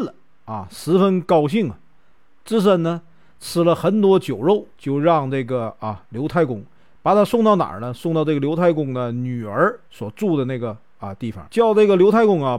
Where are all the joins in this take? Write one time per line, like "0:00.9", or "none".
0:04.7
0:09.9
0:11.5